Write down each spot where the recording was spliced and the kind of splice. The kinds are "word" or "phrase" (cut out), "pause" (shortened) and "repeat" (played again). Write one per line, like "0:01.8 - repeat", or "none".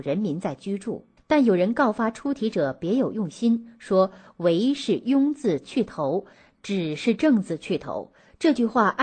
0:01.2 - pause